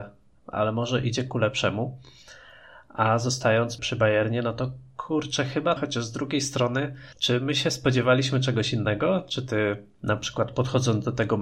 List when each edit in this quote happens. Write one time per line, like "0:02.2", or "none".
0:03.8
0:05.8
0:07.1